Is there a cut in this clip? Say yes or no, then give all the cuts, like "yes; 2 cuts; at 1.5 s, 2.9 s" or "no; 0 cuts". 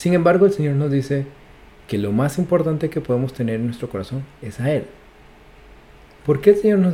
no; 0 cuts